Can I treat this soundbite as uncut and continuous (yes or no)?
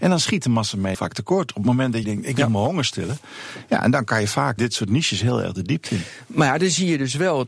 no